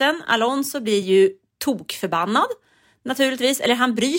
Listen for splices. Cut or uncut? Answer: uncut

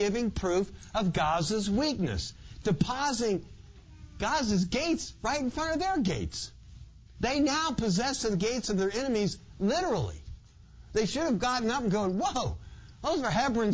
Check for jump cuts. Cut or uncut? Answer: cut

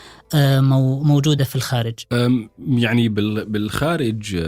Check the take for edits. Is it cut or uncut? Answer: uncut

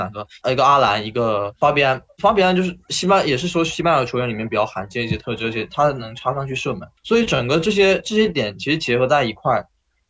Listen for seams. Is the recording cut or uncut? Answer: cut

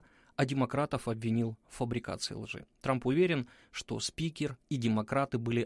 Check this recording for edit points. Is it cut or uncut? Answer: cut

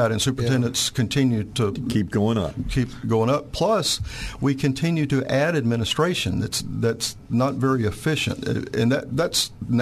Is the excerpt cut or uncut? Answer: uncut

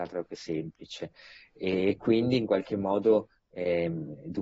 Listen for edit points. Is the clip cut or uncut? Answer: uncut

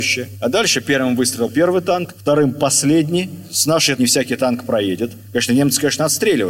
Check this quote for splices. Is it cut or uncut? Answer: cut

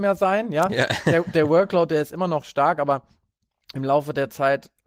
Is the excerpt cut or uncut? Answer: uncut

